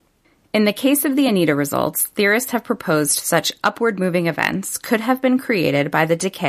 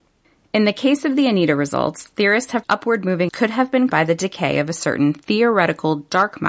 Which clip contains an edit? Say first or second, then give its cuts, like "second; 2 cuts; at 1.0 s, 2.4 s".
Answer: second; 3 cuts; at 2.6 s, 3.3 s, 3.9 s